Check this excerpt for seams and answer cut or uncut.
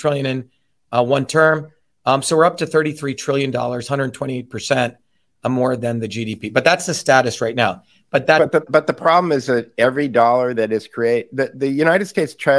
cut